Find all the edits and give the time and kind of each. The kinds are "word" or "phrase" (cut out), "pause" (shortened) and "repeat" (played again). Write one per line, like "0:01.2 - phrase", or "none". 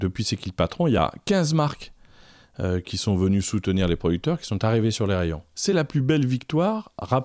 none